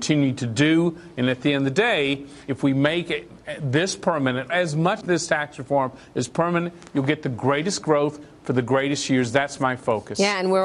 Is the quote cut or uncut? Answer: cut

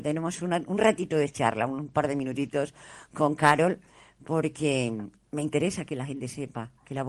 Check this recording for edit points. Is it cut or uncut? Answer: uncut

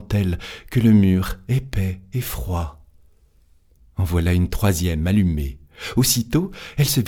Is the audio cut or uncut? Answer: uncut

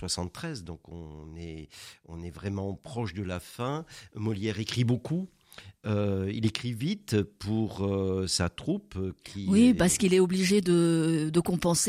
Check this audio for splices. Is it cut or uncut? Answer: uncut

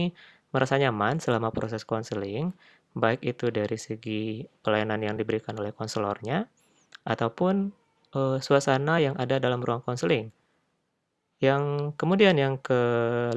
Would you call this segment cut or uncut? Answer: uncut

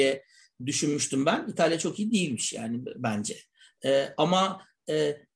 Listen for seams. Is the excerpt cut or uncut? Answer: uncut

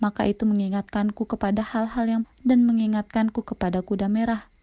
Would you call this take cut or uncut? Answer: cut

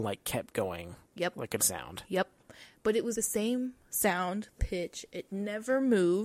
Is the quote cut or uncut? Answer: cut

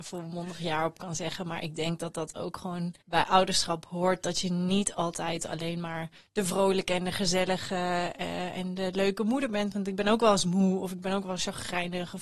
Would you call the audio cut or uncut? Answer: cut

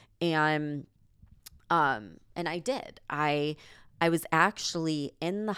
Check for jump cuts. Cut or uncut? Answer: uncut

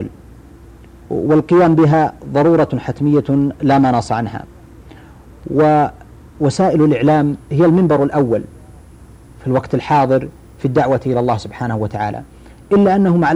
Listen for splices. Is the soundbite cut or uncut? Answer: uncut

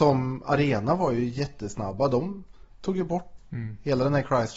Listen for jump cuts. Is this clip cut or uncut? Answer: cut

